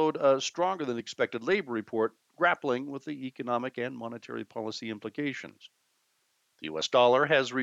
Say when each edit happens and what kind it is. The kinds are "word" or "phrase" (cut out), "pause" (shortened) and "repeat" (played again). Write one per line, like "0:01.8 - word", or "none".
none